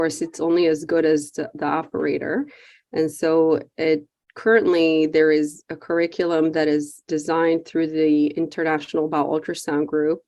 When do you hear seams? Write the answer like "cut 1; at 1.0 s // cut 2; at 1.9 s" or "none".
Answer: none